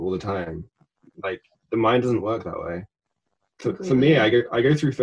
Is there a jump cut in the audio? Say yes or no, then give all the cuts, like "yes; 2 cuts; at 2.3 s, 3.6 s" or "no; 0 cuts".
no; 0 cuts